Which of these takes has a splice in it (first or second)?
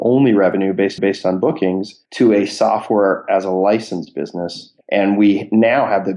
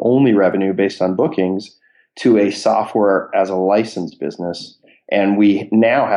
first